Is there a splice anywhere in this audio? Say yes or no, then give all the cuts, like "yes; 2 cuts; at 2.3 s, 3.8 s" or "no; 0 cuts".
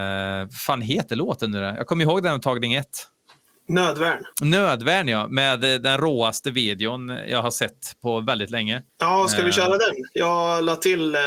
yes; 2 cuts; at 4.3 s, 8.9 s